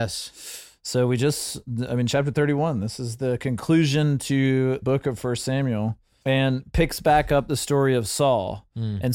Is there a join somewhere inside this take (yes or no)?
yes